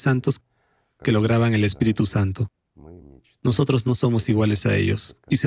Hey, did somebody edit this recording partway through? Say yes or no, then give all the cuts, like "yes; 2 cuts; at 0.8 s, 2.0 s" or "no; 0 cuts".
no; 0 cuts